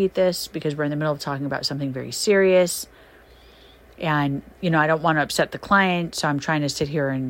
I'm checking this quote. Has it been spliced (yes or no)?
no